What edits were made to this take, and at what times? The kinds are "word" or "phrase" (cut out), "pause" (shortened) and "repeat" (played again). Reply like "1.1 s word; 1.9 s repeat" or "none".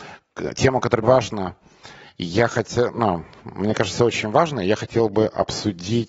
1.0 s word

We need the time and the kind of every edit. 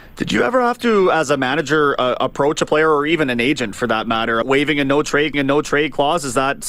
4.4 s word; 5.3 s repeat

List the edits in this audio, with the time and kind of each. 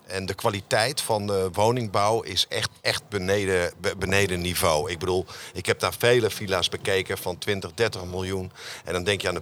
2.8 s pause

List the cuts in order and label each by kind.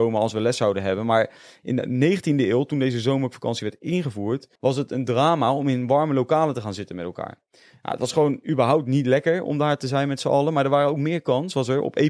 4.6 s pause

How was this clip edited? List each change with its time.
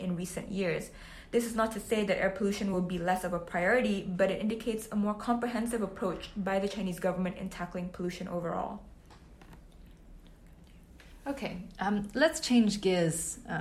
none

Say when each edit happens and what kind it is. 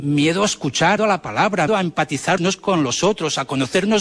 1.0 s word; 1.7 s word; 2.4 s word

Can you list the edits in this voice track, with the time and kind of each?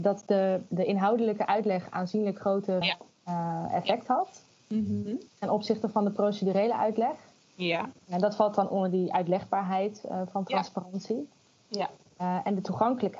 2.8 s word

